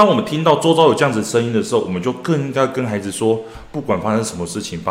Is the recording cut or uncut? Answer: uncut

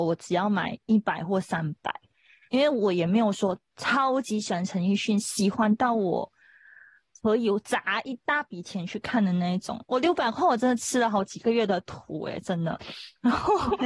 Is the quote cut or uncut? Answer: cut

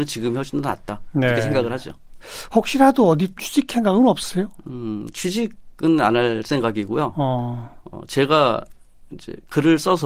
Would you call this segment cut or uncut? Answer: cut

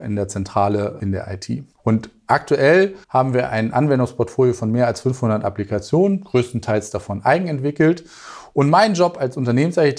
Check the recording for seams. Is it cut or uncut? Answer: cut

